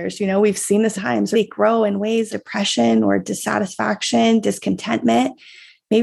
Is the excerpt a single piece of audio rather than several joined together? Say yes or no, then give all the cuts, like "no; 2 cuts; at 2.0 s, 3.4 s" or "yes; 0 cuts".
no; 3 cuts; at 0.9 s, 1.3 s, 2.3 s